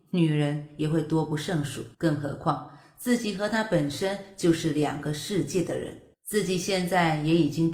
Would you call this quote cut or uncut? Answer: cut